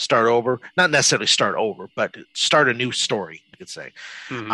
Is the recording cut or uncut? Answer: cut